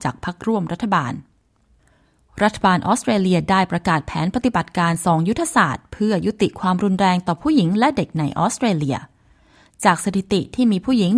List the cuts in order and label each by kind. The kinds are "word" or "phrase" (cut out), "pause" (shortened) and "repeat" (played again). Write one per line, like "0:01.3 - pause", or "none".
none